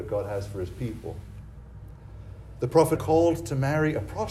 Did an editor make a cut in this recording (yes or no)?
yes